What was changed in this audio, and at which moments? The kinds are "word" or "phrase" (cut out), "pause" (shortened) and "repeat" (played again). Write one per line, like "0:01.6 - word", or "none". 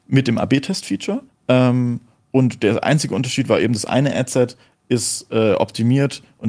0:01.3 - pause

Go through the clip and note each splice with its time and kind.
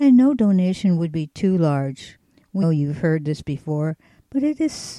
0:02.6 - word

